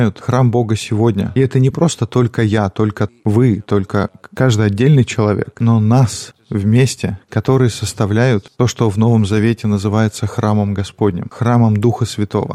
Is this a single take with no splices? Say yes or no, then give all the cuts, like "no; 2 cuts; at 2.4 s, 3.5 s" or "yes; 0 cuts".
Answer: yes; 0 cuts